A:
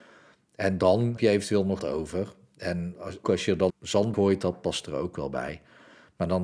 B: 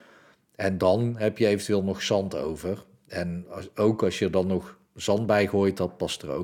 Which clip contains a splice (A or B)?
A